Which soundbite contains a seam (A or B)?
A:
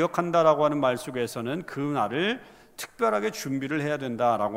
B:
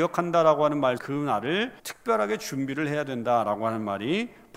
B